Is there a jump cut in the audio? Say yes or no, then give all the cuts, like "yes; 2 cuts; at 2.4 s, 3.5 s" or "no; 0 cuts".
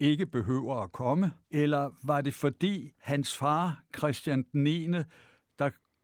yes; 2 cuts; at 1.4 s, 2.9 s